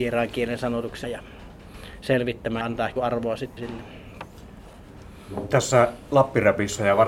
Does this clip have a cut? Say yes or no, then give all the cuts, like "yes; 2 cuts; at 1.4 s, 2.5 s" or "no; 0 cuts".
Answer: yes; 4 cuts; at 1.0 s, 2.6 s, 3.0 s, 3.6 s